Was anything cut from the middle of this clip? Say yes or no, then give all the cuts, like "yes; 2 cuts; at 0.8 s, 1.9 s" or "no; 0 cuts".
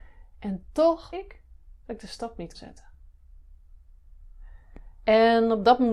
yes; 2 cuts; at 1.1 s, 2.5 s